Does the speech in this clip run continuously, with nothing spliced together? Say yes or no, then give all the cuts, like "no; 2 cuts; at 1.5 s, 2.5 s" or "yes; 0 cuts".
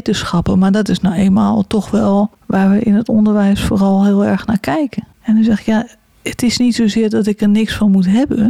yes; 0 cuts